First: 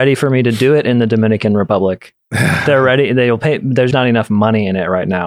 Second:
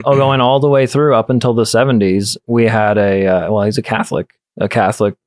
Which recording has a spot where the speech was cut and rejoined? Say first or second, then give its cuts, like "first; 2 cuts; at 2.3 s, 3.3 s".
first; 1 cut; at 3.9 s